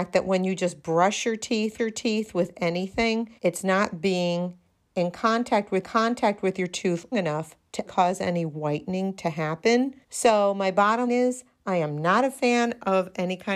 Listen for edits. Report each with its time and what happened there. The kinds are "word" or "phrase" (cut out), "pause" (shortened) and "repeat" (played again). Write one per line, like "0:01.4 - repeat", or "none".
0:01.8 - repeat
0:03.4 - pause
0:05.8 - repeat
0:07.1 - word
0:07.9 - word
0:10.0 - pause
0:11.1 - word